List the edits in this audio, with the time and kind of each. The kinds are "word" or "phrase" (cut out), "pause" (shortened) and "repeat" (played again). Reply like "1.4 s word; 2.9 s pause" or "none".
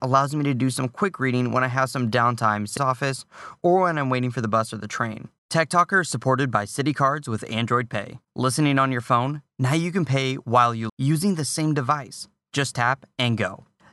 2.8 s phrase; 5.4 s pause; 8.2 s pause; 10.9 s word